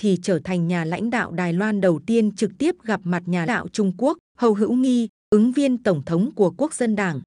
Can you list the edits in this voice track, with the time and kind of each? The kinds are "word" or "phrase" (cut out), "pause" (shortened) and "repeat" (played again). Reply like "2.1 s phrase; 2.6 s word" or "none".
3.5 s word; 4.3 s pause